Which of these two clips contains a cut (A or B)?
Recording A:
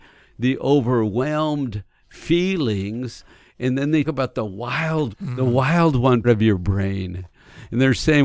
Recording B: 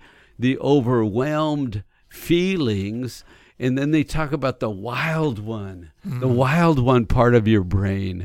A